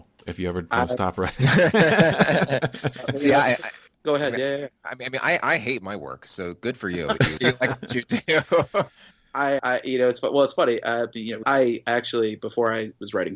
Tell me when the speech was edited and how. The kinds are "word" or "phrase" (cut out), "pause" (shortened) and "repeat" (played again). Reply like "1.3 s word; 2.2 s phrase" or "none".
7.4 s word; 9.6 s word; 11.4 s word